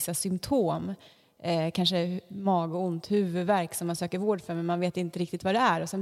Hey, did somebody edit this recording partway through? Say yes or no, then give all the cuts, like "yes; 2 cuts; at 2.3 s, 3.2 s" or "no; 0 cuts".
no; 0 cuts